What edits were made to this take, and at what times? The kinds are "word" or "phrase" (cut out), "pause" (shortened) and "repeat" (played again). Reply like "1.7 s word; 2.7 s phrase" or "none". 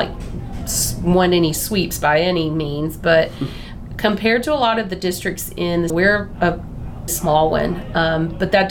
5.9 s phrase; 7.1 s word